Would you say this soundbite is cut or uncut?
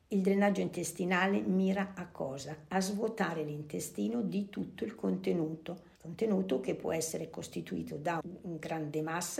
cut